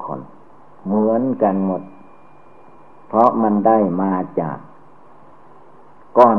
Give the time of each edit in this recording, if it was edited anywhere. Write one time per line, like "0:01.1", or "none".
none